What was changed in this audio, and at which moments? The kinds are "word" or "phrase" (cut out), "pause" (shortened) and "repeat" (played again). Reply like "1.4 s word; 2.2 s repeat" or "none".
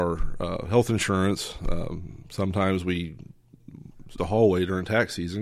4.2 s word